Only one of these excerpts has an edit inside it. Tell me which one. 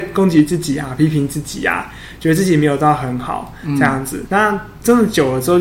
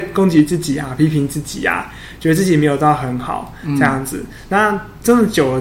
first; 1 cut; at 4.3 s

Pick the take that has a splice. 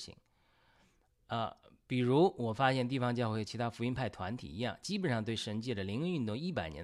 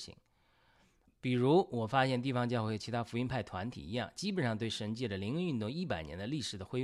second; 1 cut; at 1.1 s

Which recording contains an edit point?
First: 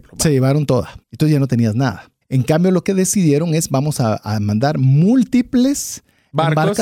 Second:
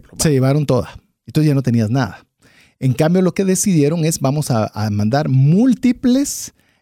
first; 2 cuts; at 1.0 s, 2.2 s

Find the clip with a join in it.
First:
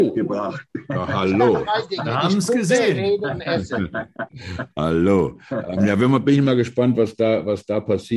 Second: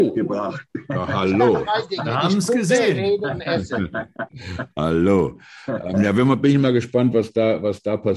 first; 1 cut; at 5.5 s

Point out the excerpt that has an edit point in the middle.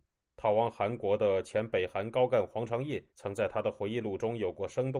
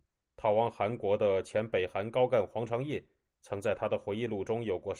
first; 1 cut; at 3.1 s

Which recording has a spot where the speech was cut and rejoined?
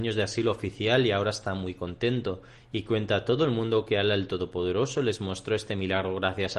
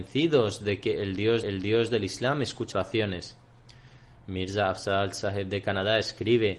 second; 2 cuts; at 1.4 s, 2.7 s

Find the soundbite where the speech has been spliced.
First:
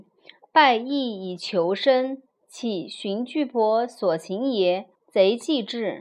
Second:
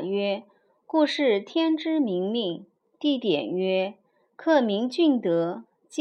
first; 1 cut; at 5.0 s

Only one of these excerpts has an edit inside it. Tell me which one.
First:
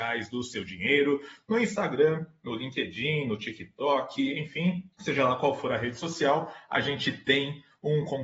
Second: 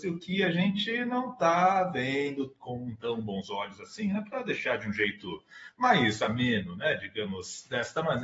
first; 1 cut; at 4.9 s

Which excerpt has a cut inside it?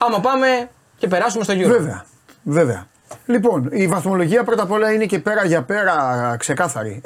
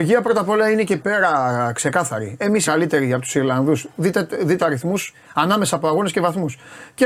second; 4 cuts; at 1.0 s, 2.7 s, 4.6 s, 5.1 s

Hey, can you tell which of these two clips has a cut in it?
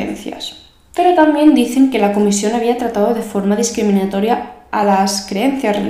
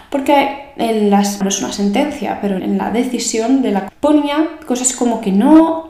second; 3 cuts; at 1.4 s, 2.6 s, 3.9 s

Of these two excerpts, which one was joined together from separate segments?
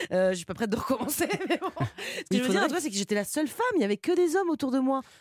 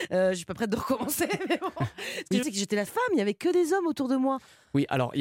second; 2 cuts; at 2.4 s, 2.9 s

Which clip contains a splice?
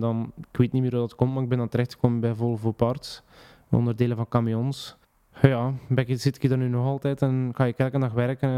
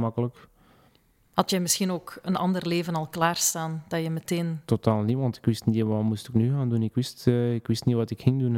first; 1 cut; at 5.0 s

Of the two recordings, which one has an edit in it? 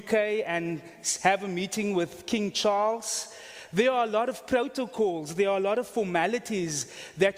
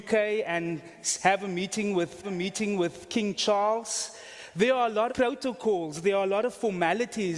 second; 2 cuts; at 2.2 s, 5.1 s

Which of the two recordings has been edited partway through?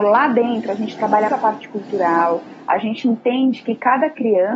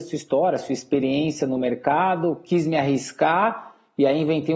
first; 1 cut; at 1.3 s

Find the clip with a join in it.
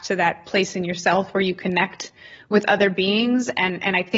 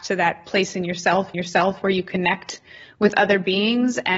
second; 1 cut; at 1.3 s

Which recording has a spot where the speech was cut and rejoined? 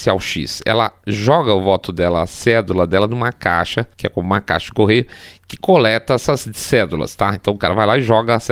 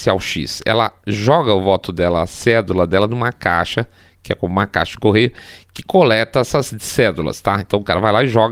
first; 1 cut; at 3.9 s

